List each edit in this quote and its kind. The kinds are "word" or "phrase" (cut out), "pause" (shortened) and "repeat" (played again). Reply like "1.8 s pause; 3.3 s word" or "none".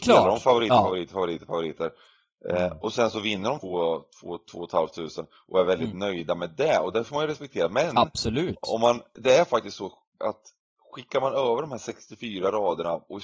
3.6 s word; 9.1 s word

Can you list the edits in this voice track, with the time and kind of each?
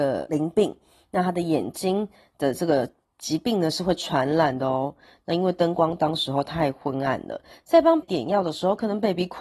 8.0 s word

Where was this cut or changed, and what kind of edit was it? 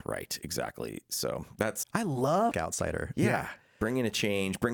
1.8 s word; 2.5 s phrase

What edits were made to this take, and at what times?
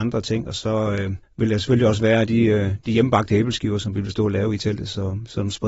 1.2 s pause

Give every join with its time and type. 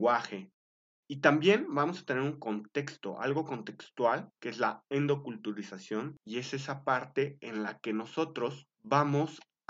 none

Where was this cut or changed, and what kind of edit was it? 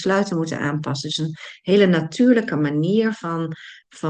none

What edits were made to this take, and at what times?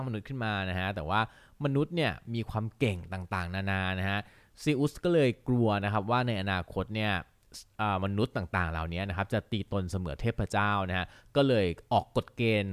none

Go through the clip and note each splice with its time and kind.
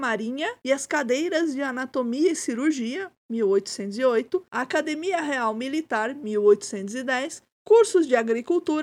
7.5 s pause

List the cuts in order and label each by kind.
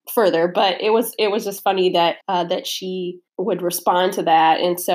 2.2 s pause; 3.3 s pause

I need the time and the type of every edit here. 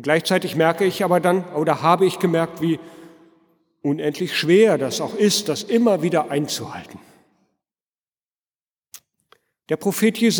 none

